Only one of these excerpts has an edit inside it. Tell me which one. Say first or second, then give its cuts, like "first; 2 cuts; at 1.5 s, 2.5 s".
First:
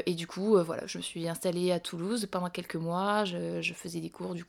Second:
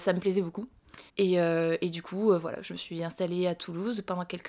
second; 1 cut; at 1.1 s